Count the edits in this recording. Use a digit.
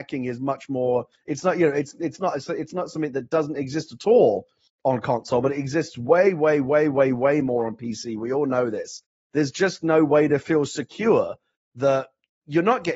0